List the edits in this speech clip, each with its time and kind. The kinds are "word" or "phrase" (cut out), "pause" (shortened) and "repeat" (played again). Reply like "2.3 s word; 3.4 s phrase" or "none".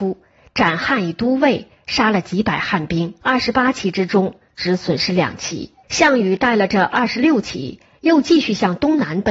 3.2 s pause; 5.8 s pause